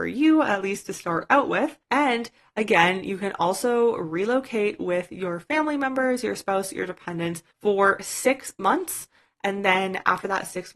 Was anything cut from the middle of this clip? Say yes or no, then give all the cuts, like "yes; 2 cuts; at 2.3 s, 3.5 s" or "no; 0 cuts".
yes; 2 cuts; at 1.8 s, 7.5 s